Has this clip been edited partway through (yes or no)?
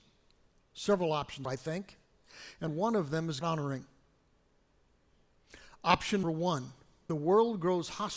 yes